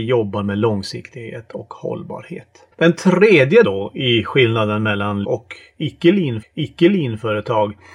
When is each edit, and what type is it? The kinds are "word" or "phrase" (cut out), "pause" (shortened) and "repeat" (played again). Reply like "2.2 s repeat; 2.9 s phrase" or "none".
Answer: 2.7 s pause; 3.6 s word; 5.2 s word; 6.4 s repeat

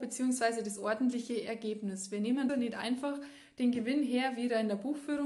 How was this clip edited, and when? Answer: 2.5 s word

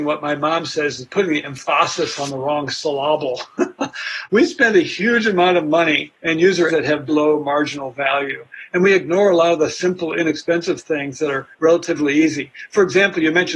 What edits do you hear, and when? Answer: 6.1 s pause; 6.7 s phrase; 7.1 s word; 11.5 s pause

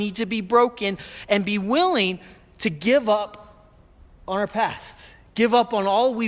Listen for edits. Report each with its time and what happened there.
none

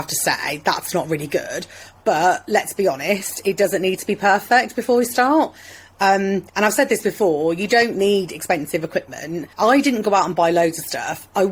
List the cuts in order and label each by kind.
6.5 s pause; 9.5 s pause

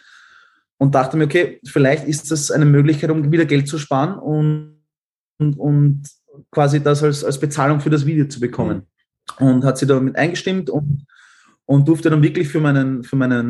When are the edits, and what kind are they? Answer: none

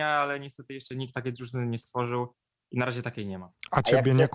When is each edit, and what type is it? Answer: none

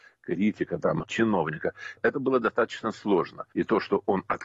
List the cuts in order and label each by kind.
1.0 s phrase; 3.5 s pause

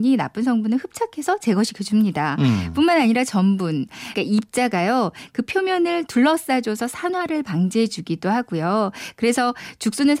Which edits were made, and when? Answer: 4.1 s word

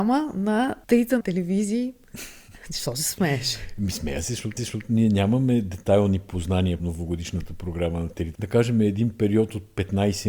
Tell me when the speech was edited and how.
1.2 s word; 4.6 s repeat; 6.8 s word; 8.3 s phrase

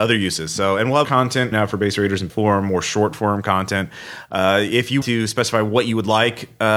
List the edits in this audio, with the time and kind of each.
1.0 s word; 1.5 s word; 2.3 s word; 5.0 s word

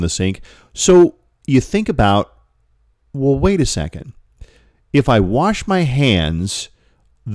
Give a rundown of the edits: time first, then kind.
none

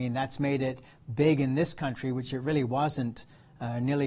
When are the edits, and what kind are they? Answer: none

